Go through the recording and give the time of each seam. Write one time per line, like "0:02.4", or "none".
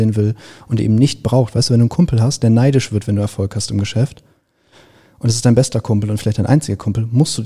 none